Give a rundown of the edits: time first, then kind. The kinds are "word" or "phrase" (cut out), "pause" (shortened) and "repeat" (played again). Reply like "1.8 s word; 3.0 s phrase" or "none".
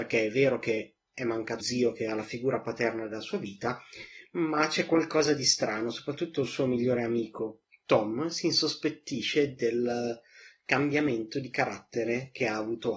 1.6 s word